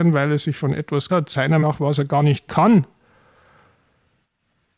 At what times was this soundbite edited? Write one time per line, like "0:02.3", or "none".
0:01.1
0:01.6
0:02.5

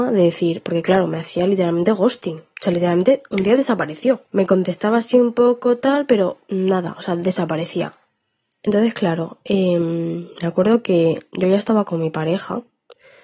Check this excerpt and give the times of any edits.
none

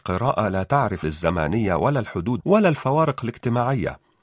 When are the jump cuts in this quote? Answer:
0:01.0
0:02.4

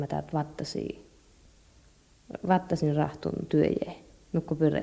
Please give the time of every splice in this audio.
none

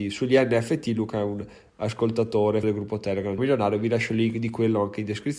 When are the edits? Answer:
0:02.6
0:03.4

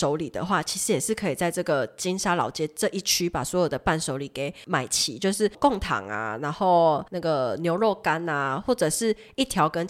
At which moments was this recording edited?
0:07.1

